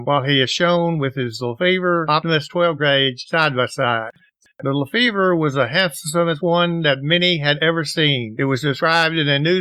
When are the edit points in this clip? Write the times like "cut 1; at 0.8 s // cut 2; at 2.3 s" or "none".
none